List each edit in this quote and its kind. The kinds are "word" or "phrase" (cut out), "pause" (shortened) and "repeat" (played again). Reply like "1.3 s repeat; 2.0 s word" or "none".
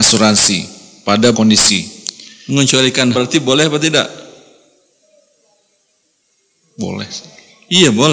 1.3 s word; 3.1 s word